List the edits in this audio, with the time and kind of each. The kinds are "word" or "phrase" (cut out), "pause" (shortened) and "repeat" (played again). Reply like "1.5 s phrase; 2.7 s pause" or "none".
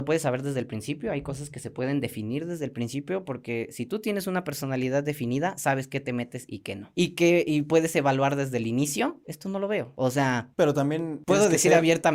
none